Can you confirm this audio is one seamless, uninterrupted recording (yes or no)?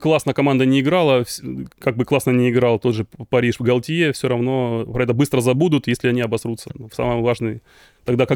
no